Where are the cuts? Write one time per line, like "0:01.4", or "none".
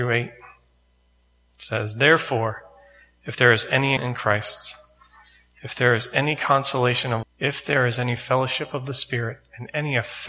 0:04.0
0:07.2